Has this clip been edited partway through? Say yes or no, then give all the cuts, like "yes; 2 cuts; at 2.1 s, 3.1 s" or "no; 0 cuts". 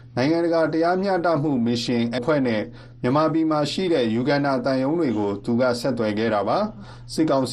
yes; 1 cut; at 2.2 s